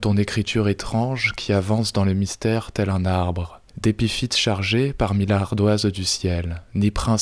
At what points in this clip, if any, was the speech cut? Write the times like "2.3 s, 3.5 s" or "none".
3.7 s